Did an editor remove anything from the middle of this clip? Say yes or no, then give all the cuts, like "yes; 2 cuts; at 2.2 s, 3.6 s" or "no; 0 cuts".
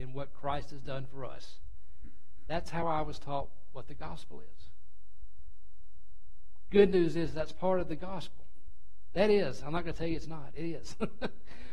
no; 0 cuts